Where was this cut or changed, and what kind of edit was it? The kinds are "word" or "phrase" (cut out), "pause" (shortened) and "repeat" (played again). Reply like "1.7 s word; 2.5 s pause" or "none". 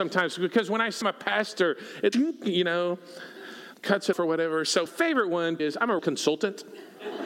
1.0 s word; 2.1 s word; 3.7 s word; 4.1 s word; 4.9 s word; 5.6 s word; 6.0 s word

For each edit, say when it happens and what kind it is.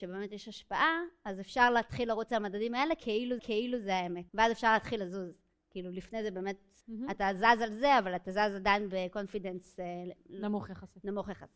3.4 s repeat; 4.3 s pause; 6.8 s pause

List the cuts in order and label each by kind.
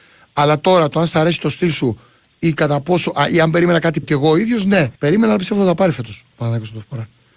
4.0 s word; 5.0 s pause

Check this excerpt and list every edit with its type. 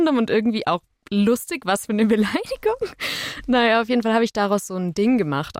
none

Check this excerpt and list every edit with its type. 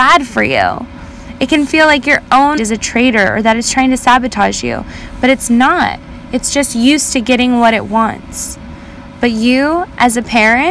2.6 s word

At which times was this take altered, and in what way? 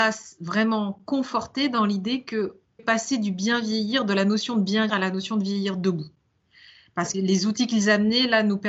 2.8 s phrase; 4.9 s word; 7.1 s word

